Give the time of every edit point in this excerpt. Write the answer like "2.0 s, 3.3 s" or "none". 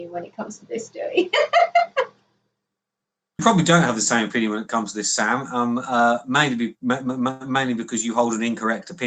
3.4 s